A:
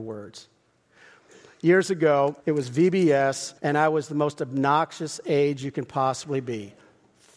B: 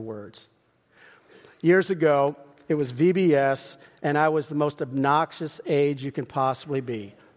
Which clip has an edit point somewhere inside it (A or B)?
A